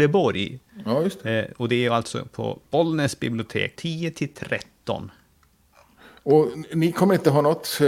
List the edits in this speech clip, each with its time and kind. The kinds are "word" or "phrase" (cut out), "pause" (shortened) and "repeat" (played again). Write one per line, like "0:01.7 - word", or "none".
0:02.6 - pause
0:03.8 - phrase